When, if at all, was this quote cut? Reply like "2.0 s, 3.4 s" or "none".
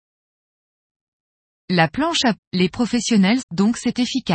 2.4 s, 2.7 s, 3.4 s